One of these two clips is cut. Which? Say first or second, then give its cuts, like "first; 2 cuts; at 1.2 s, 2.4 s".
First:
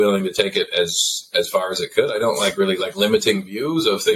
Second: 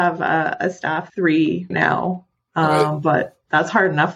second; 2 cuts; at 1.1 s, 1.7 s